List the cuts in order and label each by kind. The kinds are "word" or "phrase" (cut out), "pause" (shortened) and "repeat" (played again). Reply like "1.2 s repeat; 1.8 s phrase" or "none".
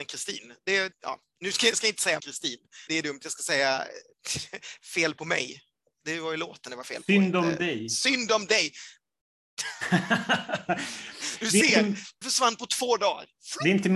1.7 s word; 2.2 s word; 2.9 s word; 12.2 s word